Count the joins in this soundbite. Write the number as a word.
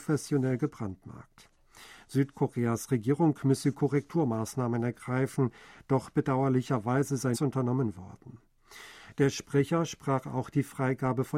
one